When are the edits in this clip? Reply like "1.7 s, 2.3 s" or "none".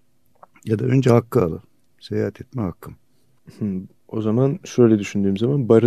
1.9 s